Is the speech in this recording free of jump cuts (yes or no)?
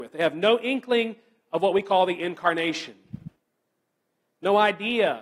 yes